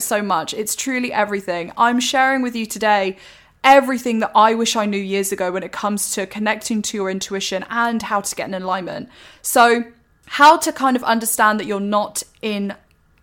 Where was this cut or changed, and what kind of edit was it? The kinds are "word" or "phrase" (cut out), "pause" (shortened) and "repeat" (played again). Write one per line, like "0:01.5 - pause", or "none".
none